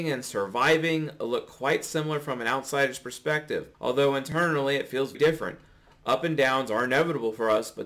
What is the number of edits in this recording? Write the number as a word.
two